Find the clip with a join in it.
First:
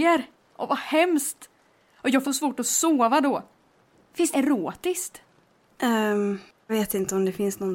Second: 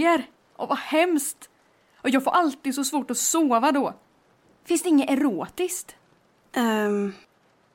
first; 3 cuts; at 2.2 s, 4.3 s, 6.7 s

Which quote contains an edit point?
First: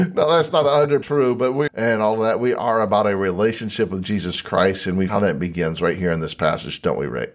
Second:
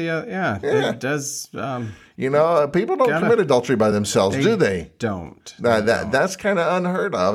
first; 3 cuts; at 1.0 s, 1.7 s, 5.1 s

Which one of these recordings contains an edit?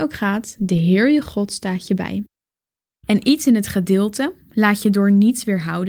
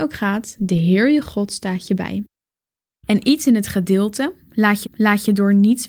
second; 1 cut; at 4.8 s

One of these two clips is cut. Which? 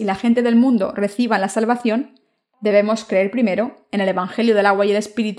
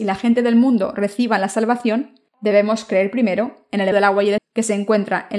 second; 3 cuts; at 2.3 s, 3.9 s, 4.4 s

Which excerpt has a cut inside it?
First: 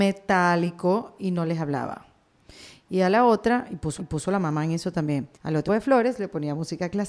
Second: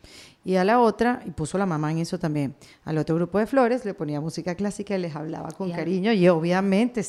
first; 3 cuts; at 4.0 s, 5.3 s, 5.7 s

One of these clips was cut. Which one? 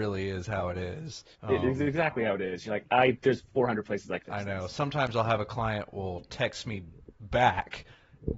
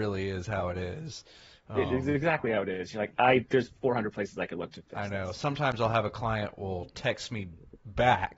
first; 2 cuts; at 1.3 s, 4.2 s

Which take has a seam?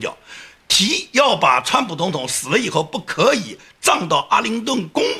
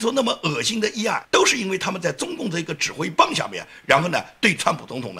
second; 1 cut; at 1.2 s

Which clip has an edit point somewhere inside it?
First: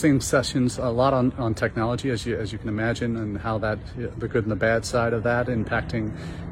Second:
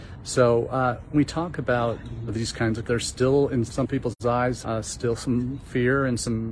second; 5 cuts; at 1.1 s, 2.3 s, 2.8 s, 3.7 s, 4.6 s

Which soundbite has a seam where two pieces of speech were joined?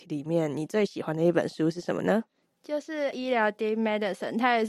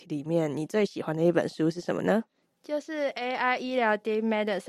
first; 1 cut; at 3.1 s

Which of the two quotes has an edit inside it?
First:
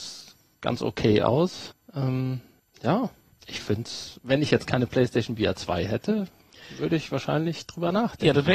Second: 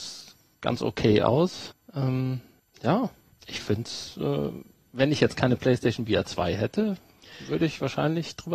first; 1 cut; at 4.1 s

